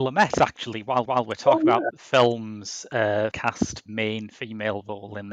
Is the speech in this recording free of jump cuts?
no; 4 cuts; at 1.1 s, 1.9 s, 3.3 s, 3.9 s

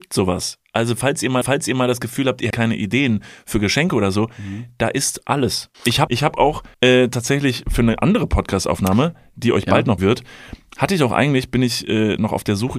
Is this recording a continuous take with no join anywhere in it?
no; 6 cuts; at 1.4 s, 2.5 s, 5.7 s, 6.1 s, 6.7 s, 10.0 s

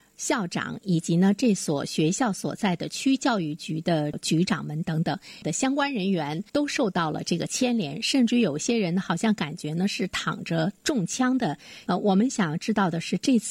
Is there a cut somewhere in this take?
yes; 2 cuts; at 6.5 s, 10.8 s

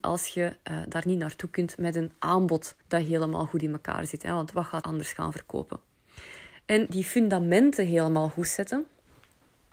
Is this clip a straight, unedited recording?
no; 3 cuts; at 2.8 s, 4.8 s, 6.9 s

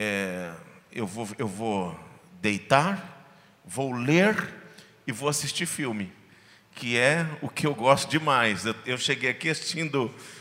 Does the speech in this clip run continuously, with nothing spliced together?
yes; 0 cuts

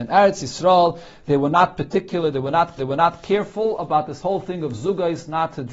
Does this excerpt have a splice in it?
yes; 1 cut; at 2.8 s

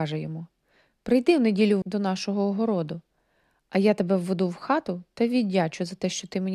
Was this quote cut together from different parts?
yes; 1 cut; at 1.8 s

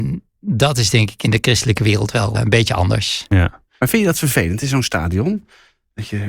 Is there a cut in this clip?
yes; 2 cuts; at 2.3 s, 3.7 s

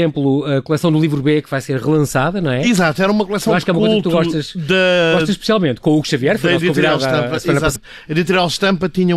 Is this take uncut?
no; 1 cut; at 7.8 s

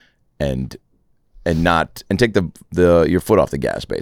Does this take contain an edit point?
no; 0 cuts

